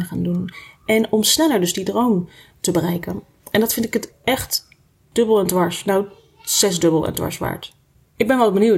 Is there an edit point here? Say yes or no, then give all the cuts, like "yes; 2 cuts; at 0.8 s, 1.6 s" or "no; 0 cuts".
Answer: no; 0 cuts